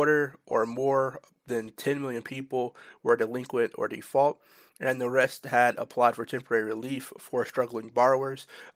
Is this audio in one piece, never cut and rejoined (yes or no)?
yes